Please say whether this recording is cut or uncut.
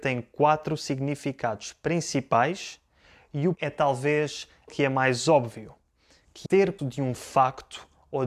cut